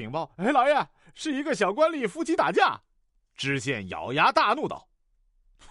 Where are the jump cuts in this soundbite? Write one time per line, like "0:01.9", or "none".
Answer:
none

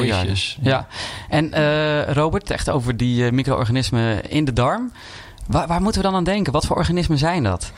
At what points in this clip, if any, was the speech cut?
0:02.5

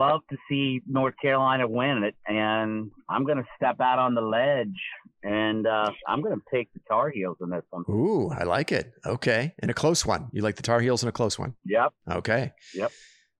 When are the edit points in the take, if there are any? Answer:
0:11.6

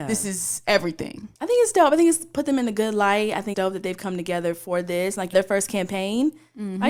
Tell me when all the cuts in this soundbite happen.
0:03.5
0:05.3

